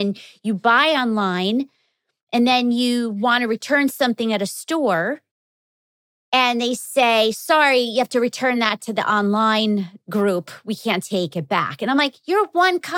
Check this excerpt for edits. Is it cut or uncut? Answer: uncut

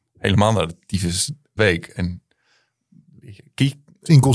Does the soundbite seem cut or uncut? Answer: cut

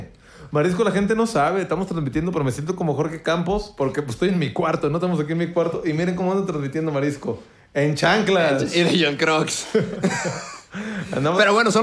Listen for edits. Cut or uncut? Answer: uncut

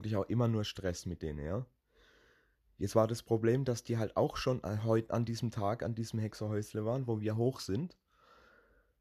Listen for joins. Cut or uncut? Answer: uncut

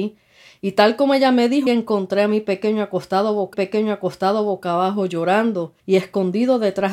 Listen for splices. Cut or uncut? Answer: cut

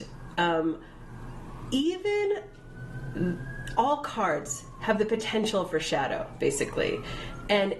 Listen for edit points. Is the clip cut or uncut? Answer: uncut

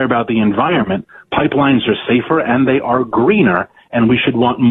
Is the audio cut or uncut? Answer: uncut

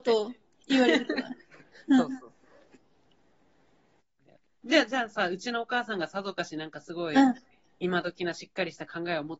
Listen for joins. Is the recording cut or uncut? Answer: uncut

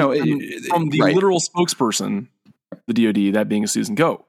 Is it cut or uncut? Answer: cut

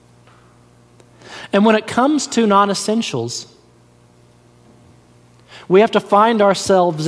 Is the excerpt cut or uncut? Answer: uncut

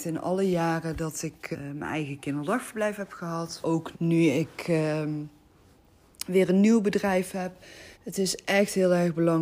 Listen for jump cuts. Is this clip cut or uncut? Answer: cut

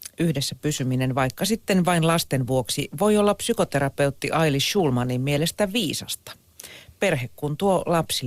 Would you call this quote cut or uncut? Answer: uncut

